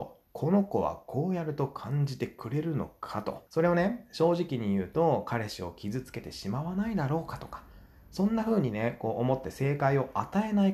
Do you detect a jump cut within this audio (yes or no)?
yes